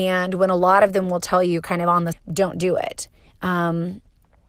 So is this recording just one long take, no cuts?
no; 1 cut; at 2.1 s

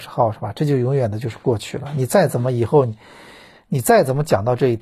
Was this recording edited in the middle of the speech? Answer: no; 0 cuts

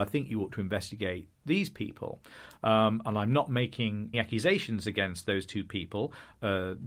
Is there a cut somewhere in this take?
yes; 1 cut; at 4.1 s

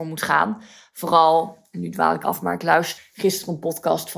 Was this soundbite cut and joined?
yes; 2 cuts; at 2.2 s, 3.0 s

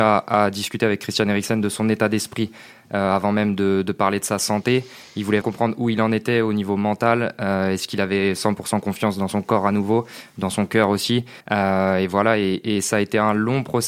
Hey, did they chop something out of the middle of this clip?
yes; 2 cuts; at 5.4 s, 11.4 s

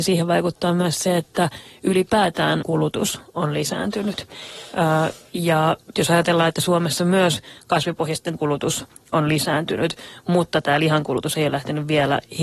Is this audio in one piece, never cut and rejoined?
no; 3 cuts; at 2.6 s, 5.9 s, 8.4 s

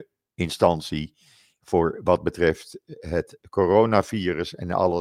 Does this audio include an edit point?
no; 0 cuts

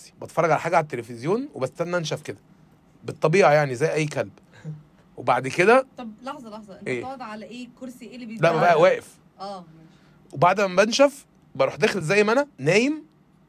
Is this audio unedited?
yes; 0 cuts

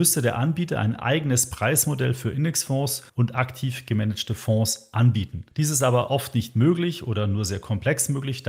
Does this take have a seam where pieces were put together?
no; 0 cuts

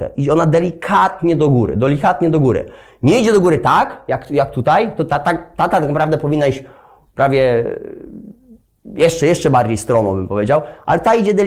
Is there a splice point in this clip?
no; 0 cuts

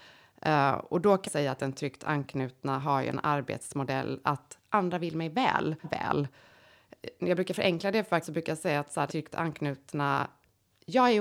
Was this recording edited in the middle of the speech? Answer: yes; 4 cuts; at 1.3 s, 5.8 s, 8.2 s, 9.1 s

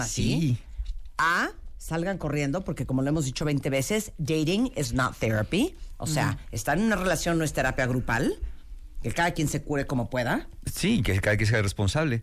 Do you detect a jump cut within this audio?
no; 0 cuts

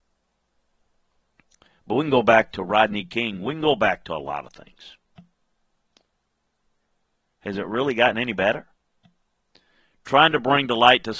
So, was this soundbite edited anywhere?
no; 0 cuts

